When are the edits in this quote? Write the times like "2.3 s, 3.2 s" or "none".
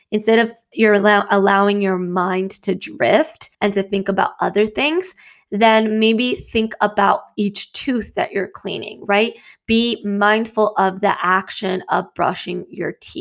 3.5 s